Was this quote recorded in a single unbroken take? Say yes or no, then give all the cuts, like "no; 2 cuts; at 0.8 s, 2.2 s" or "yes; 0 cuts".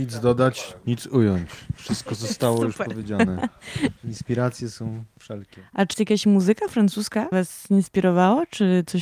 no; 3 cuts; at 4.0 s, 5.9 s, 7.3 s